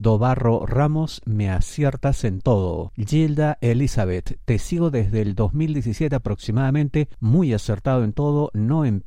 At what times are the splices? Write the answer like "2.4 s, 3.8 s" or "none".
none